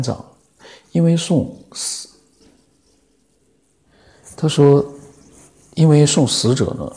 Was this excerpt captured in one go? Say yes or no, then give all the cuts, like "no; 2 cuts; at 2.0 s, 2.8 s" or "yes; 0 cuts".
yes; 0 cuts